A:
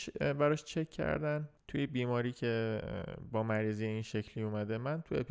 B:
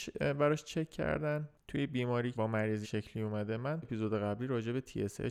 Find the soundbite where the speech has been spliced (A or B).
B